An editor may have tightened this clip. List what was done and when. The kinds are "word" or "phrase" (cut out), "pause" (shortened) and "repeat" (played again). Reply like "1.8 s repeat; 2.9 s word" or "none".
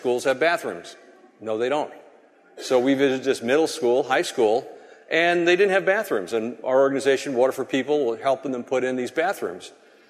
none